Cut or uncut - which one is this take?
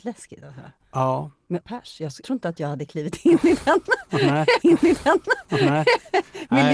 cut